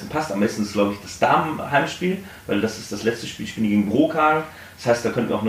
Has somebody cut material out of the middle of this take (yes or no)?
no